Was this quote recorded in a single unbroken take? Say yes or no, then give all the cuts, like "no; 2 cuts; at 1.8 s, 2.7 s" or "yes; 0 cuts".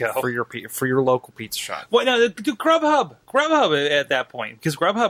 no; 1 cut; at 3.2 s